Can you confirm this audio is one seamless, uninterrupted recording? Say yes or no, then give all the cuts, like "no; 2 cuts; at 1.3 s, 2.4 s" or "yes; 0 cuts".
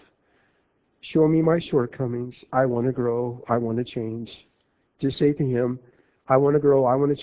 yes; 0 cuts